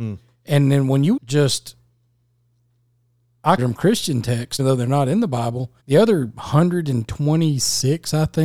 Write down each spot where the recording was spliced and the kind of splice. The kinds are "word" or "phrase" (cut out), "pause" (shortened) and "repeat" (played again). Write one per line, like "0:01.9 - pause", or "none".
0:01.2 - phrase
0:03.6 - word
0:04.6 - word
0:05.8 - pause